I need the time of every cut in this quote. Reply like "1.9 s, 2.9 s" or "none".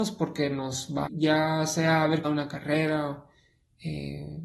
1.1 s, 2.2 s